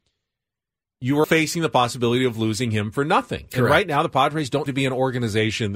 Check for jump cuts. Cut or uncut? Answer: cut